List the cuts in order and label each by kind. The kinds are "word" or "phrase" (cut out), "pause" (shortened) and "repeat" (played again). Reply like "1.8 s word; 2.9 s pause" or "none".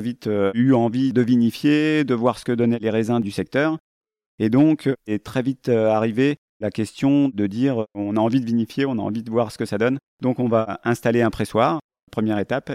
10.1 s pause